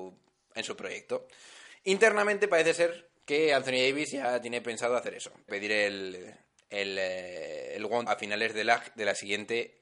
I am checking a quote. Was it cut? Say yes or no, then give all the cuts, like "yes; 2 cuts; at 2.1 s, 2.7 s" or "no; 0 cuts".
yes; 2 cuts; at 5.5 s, 8.1 s